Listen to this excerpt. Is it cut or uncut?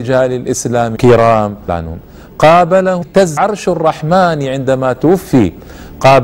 cut